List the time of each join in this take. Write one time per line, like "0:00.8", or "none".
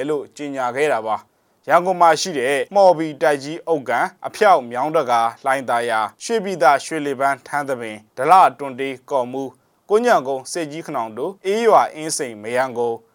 0:01.3
0:02.7
0:04.2
0:06.1
0:08.1
0:11.4